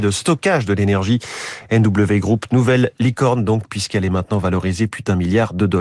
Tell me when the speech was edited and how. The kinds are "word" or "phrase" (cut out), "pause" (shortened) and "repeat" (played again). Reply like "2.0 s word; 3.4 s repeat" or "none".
none